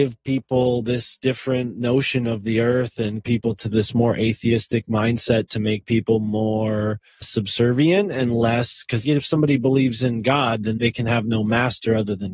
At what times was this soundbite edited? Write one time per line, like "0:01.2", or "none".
0:03.2
0:07.2
0:09.0
0:10.8